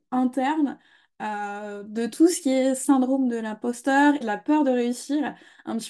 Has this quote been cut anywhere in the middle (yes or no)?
yes